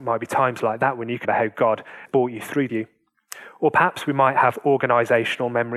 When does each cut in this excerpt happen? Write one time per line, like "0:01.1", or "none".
0:01.2
0:02.1
0:02.7